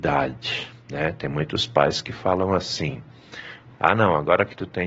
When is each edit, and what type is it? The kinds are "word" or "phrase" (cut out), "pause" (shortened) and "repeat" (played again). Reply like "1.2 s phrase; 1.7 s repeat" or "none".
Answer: none